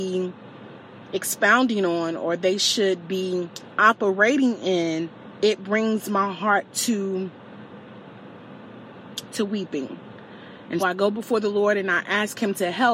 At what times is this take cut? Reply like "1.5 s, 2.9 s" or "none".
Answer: 10.8 s